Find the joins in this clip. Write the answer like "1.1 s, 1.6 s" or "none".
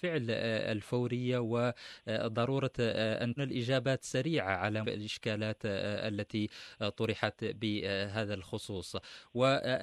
3.4 s, 4.8 s